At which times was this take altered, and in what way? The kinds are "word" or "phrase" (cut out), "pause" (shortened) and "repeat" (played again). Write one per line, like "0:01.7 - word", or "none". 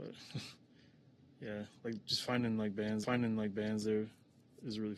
0:03.0 - repeat

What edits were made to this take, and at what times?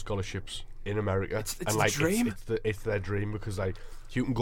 none

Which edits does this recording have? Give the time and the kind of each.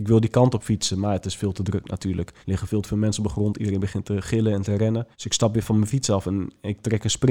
0:02.4 - pause
0:05.1 - pause

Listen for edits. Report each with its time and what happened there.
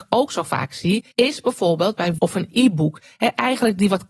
0:01.1 - pause
0:02.2 - word

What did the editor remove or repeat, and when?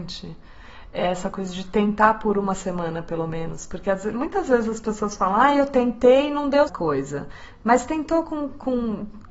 0:06.7 - phrase

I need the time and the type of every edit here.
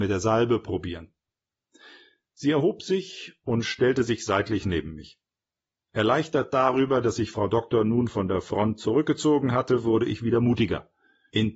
none

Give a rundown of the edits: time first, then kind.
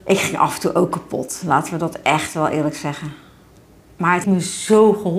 0:04.2 - word

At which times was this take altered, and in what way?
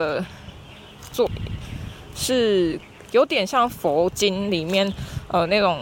none

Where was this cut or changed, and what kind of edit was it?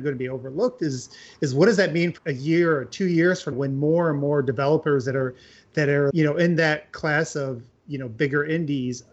0:02.2 - word
0:03.5 - word
0:06.1 - word

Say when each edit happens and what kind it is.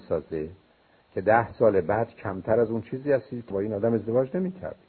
0:03.5 - word

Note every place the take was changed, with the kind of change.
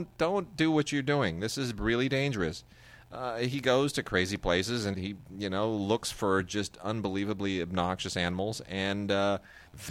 0:04.9 - word

